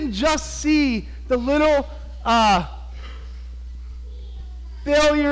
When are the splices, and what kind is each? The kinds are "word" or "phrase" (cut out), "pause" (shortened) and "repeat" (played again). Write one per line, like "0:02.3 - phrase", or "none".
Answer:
none